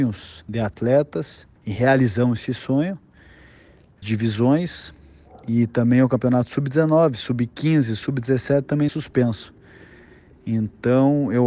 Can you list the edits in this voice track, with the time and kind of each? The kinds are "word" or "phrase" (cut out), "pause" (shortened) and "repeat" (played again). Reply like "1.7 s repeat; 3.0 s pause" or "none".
1.6 s pause; 4.0 s phrase; 8.9 s word